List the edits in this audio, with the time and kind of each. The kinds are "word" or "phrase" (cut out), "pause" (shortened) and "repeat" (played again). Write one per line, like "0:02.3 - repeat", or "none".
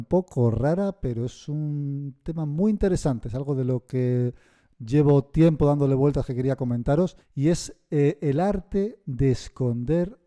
0:07.2 - pause